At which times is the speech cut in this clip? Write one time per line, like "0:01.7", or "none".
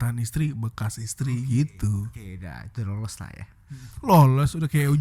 none